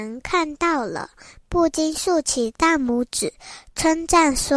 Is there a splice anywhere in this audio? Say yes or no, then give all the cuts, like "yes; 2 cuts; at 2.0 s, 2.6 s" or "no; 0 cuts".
no; 0 cuts